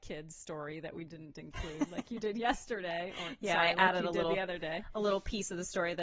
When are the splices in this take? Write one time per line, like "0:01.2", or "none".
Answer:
none